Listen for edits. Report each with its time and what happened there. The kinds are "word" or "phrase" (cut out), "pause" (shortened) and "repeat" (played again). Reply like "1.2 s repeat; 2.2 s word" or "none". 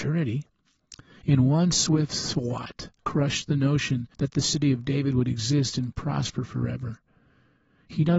3.0 s word